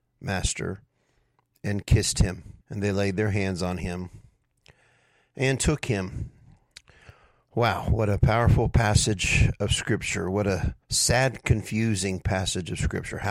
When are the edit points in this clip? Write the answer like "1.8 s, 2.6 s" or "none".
2.6 s, 10.8 s